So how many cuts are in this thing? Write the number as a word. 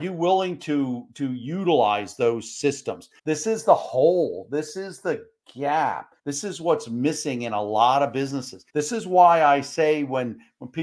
three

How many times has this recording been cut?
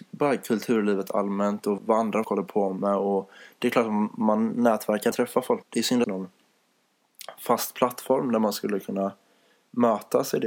five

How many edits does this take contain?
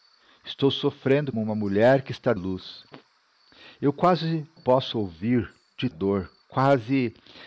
four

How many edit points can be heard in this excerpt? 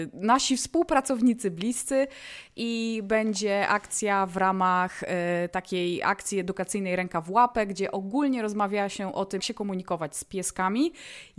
one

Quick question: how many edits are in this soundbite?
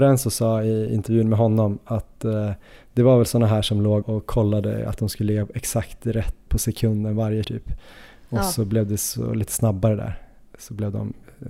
three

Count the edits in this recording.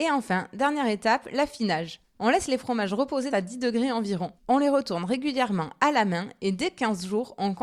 two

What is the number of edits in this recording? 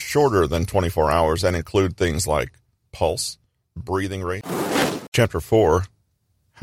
zero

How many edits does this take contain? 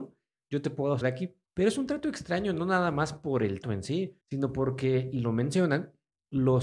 four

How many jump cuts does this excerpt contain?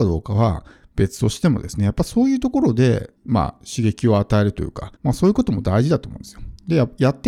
two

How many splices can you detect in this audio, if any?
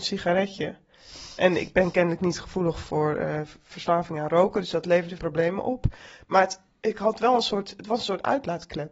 one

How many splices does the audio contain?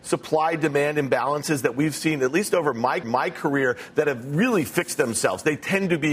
one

